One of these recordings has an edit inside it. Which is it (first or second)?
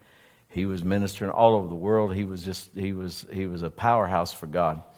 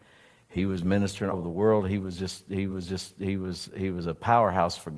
second